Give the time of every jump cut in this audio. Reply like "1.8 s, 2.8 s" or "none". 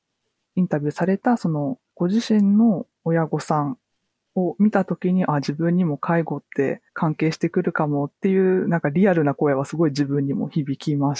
1.9 s, 3.9 s, 6.9 s